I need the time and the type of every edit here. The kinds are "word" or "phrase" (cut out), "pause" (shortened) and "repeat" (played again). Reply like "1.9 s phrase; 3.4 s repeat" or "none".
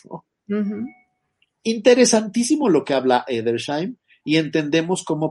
none